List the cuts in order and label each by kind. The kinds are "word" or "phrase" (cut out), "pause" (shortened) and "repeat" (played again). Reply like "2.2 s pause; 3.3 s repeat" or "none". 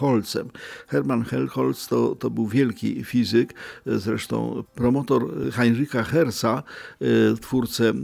none